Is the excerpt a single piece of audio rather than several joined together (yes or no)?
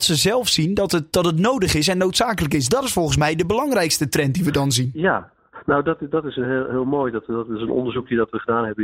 yes